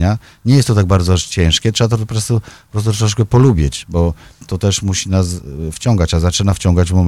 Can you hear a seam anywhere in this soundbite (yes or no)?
no